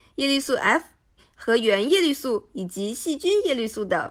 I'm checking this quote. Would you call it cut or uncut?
uncut